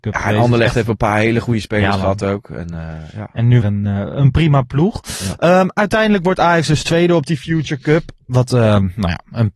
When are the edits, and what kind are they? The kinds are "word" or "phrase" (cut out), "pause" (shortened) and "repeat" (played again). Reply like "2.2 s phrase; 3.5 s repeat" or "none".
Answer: 3.6 s phrase